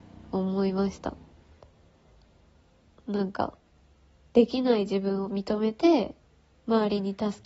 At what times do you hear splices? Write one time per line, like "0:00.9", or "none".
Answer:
none